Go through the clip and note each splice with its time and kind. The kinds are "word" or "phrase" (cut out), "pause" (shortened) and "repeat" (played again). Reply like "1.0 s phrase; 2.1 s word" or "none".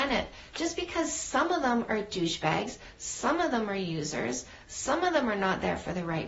none